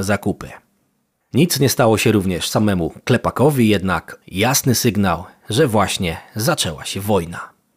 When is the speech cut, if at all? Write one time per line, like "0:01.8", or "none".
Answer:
0:04.2